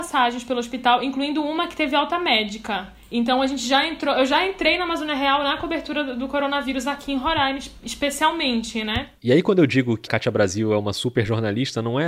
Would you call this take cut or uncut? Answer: cut